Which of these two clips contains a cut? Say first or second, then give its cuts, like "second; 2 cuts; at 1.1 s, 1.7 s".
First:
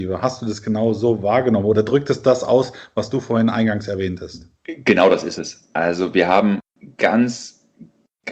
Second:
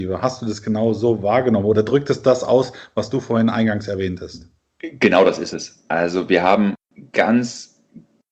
first; 1 cut; at 4.6 s